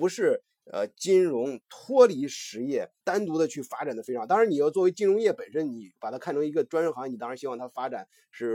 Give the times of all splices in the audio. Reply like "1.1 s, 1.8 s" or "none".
3.0 s